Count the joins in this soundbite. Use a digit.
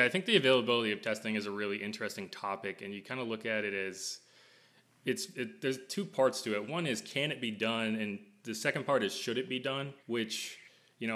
1